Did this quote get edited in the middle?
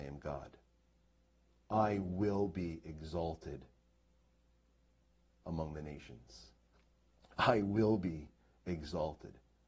no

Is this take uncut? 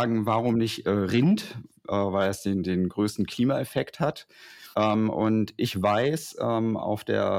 no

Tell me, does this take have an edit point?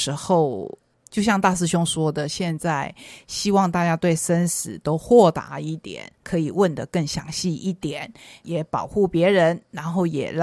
yes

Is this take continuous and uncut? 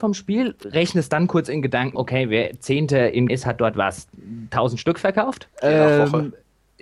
no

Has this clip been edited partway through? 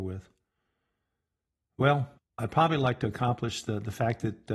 yes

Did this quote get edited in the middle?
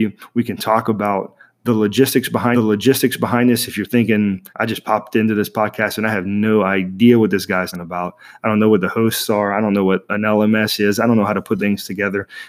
yes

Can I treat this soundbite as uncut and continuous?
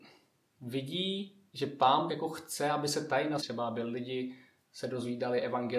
no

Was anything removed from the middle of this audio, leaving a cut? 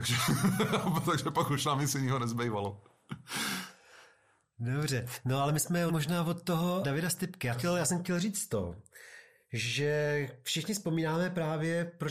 yes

